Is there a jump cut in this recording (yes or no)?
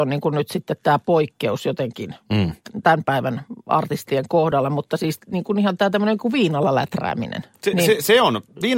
no